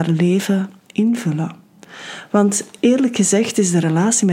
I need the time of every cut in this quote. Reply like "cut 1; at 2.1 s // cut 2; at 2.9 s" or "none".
none